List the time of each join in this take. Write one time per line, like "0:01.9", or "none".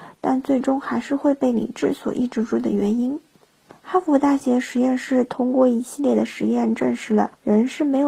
none